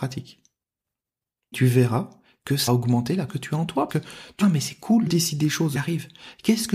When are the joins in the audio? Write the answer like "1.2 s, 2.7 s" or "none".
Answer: 1.5 s, 2.7 s, 3.3 s, 3.9 s, 4.4 s, 5.1 s, 5.8 s